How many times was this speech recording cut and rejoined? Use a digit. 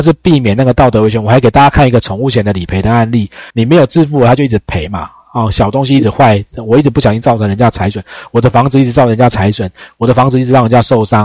1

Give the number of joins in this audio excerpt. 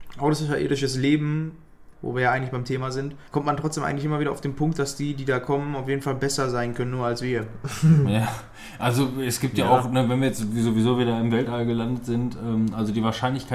2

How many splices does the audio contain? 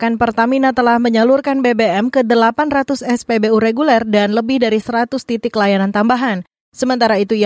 0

